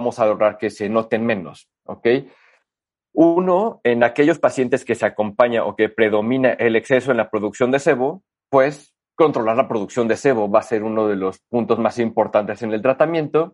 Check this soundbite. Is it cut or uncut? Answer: uncut